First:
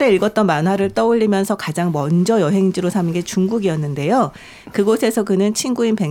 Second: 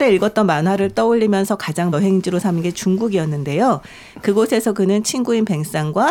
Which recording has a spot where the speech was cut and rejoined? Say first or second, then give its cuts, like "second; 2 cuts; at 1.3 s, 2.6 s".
second; 1 cut; at 1.9 s